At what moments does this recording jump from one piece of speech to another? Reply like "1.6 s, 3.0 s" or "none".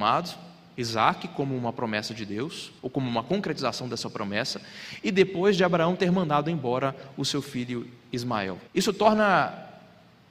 2.8 s, 8.7 s